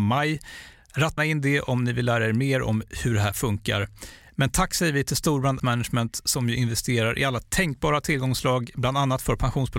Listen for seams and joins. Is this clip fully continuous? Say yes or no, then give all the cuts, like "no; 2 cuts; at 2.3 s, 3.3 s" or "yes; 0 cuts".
no; 2 cuts; at 1.2 s, 5.6 s